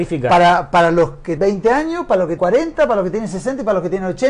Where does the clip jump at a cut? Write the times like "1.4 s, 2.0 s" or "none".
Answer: 1.4 s, 2.4 s